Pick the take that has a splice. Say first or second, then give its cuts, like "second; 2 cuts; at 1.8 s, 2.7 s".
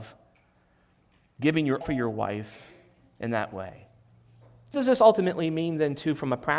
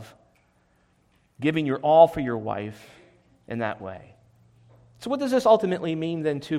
first; 2 cuts; at 1.8 s, 4.7 s